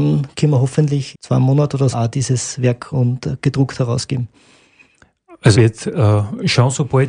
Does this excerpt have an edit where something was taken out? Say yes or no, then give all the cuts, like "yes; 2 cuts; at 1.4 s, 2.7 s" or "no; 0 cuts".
yes; 4 cuts; at 1.1 s, 1.9 s, 2.9 s, 5.5 s